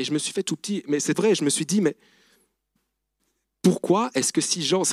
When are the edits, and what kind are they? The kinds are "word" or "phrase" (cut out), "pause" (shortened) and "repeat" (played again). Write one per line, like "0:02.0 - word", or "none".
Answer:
0:01.1 - word